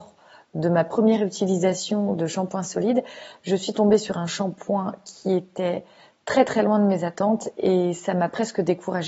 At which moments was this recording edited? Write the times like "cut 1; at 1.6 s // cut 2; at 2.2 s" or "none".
none